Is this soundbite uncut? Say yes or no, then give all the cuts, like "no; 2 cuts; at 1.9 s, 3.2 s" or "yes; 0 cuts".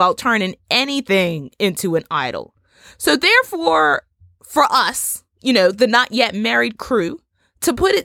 yes; 0 cuts